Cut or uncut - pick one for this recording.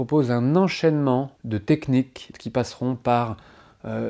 cut